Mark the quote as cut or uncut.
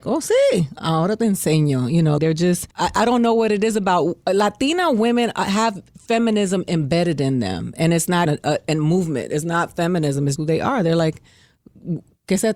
cut